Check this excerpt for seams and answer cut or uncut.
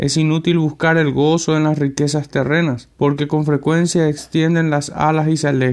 cut